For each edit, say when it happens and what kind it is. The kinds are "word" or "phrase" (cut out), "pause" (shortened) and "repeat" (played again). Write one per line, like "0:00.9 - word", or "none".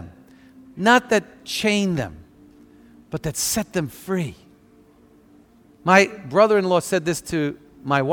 none